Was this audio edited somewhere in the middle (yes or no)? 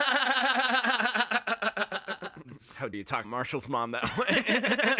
yes